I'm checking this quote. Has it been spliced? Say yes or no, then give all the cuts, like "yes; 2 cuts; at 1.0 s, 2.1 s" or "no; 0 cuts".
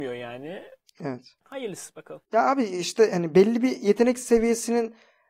no; 0 cuts